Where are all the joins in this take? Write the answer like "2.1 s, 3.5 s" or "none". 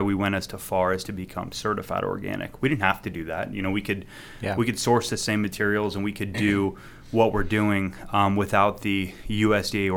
none

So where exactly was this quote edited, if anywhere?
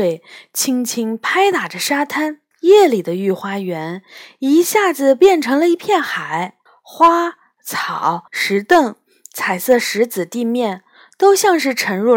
2.5 s, 6.7 s, 8.3 s

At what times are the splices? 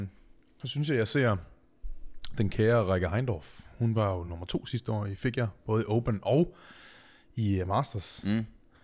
none

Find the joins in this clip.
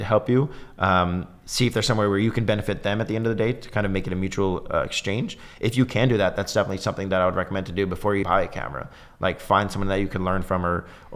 8.2 s

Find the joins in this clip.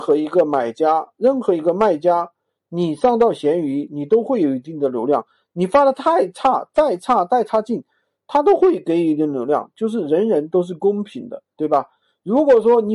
11.5 s

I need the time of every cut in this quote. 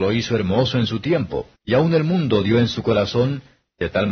1.6 s

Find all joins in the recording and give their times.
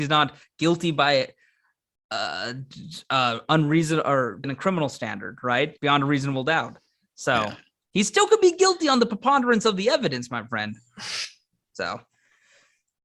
4.4 s, 5.8 s

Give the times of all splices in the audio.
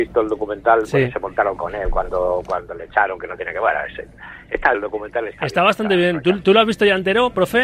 1.6 s, 4.7 s

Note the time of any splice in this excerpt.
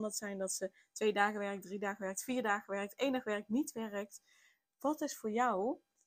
none

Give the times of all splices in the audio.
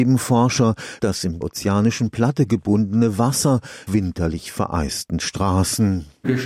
1.0 s, 1.4 s, 3.9 s

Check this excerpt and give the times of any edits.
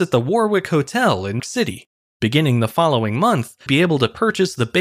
1.4 s, 2.0 s, 3.7 s

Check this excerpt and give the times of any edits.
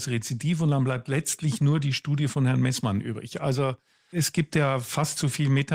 none

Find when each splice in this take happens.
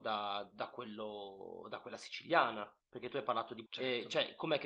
2.8 s, 3.7 s

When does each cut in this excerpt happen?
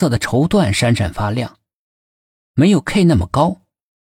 none

